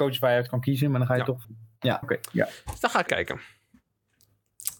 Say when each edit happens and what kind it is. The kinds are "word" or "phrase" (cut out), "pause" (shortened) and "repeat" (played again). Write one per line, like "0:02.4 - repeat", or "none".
0:01.4 - word
0:02.0 - word
0:03.1 - word